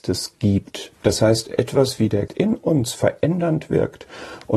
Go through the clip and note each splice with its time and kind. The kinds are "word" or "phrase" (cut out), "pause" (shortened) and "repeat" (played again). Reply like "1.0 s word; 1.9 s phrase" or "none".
2.3 s word